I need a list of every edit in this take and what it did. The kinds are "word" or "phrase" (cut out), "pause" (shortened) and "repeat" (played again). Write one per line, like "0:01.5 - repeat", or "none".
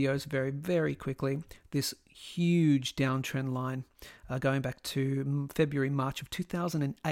none